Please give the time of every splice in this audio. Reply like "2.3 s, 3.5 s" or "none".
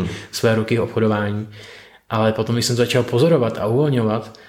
none